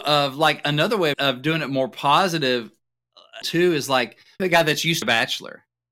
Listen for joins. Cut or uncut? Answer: cut